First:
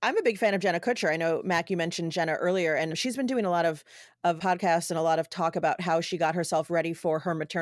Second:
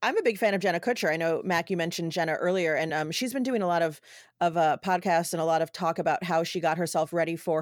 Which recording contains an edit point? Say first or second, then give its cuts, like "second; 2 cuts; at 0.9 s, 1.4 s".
first; 2 cuts; at 2.9 s, 4.4 s